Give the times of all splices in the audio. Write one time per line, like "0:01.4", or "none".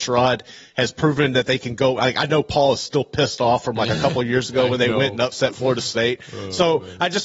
none